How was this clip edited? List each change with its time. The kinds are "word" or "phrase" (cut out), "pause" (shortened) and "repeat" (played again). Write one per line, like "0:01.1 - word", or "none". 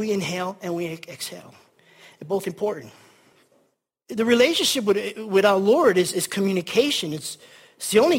none